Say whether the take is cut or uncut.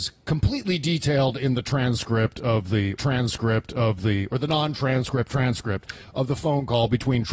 cut